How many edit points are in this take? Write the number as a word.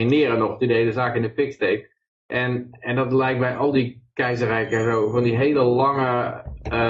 zero